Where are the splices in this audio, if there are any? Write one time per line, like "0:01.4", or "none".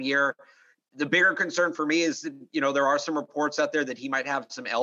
none